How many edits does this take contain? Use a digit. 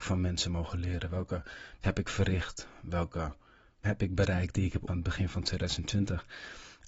3